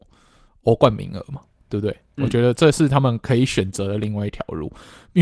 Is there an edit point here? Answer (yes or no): no